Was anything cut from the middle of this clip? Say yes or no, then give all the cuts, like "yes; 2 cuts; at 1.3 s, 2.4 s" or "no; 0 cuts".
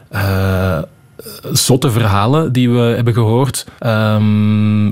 yes; 1 cut; at 3.8 s